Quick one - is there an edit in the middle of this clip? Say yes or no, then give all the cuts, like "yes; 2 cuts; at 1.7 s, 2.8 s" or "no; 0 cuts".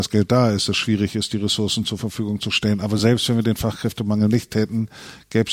no; 0 cuts